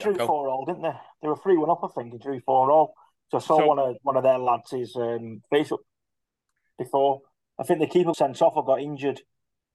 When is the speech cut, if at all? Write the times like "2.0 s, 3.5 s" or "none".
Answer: 8.1 s